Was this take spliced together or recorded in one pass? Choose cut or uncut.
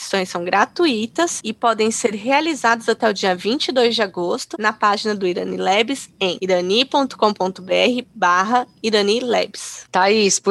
uncut